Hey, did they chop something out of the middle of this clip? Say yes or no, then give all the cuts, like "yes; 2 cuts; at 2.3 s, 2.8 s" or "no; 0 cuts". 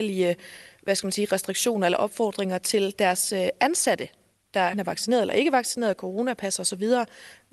yes; 1 cut; at 4.7 s